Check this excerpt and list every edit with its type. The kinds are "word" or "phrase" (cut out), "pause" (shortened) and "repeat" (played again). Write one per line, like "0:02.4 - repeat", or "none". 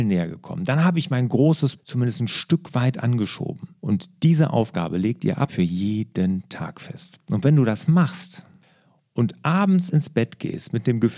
0:01.8 - word
0:03.8 - pause
0:05.5 - word

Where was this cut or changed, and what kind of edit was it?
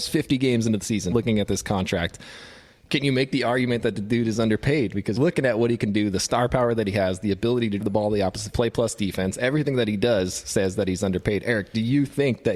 0:01.1 - word
0:05.2 - word
0:07.8 - word
0:08.5 - word

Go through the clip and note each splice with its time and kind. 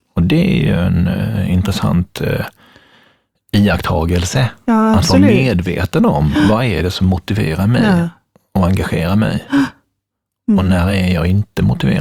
none

